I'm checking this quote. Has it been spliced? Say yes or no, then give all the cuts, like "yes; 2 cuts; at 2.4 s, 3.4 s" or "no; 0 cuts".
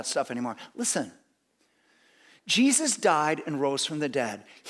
no; 0 cuts